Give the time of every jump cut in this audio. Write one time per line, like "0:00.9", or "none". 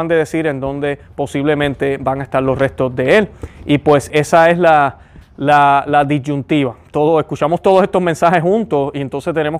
0:04.1